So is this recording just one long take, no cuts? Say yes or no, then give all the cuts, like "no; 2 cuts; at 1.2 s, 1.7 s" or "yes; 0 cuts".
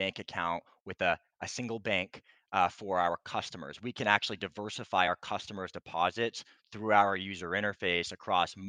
yes; 0 cuts